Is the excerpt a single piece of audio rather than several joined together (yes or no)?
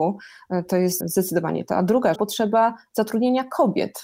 no